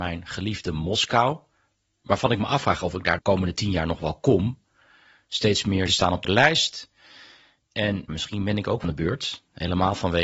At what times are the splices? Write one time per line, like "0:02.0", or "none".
0:03.2
0:05.9
0:06.2
0:08.1
0:08.8